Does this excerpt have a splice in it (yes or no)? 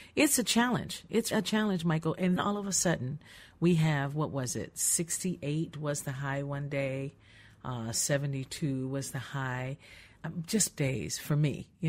yes